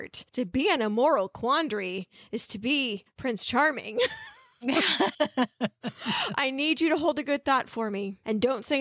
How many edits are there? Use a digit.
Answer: 0